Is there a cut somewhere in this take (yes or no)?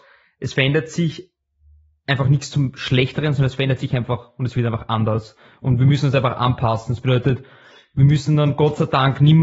no